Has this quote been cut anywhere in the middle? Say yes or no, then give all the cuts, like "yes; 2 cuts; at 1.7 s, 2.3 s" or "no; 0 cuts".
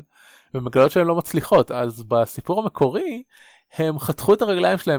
no; 0 cuts